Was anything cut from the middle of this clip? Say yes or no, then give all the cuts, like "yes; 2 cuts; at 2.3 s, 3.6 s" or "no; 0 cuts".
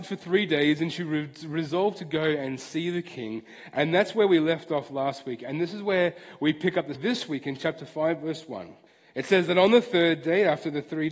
yes; 2 cuts; at 6.9 s, 8.9 s